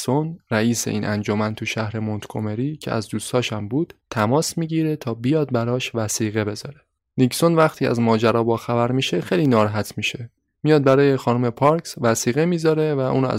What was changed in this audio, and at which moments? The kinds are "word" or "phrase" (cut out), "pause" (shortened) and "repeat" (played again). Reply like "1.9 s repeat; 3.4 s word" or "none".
none